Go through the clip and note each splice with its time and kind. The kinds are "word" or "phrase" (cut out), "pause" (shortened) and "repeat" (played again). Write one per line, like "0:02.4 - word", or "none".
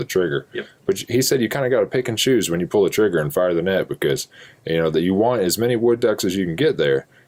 none